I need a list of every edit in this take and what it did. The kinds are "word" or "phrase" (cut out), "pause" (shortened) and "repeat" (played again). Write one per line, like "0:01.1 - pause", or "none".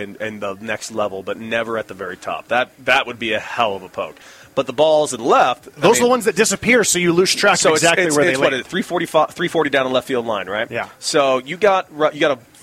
none

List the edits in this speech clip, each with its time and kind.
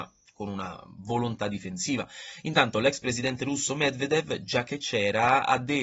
none

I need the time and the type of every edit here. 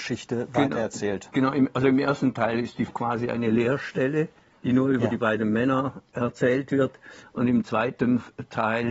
0:02.9 - word

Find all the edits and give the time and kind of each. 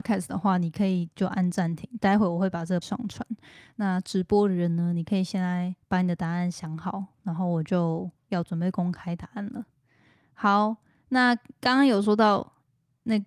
0:02.8 - word
0:05.8 - pause

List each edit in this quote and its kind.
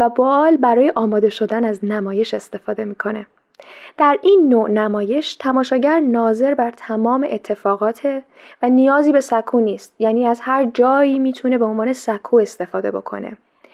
none

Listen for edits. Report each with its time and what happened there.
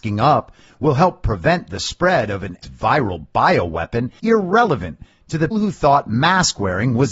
0:02.6 - word
0:04.2 - word
0:05.5 - word

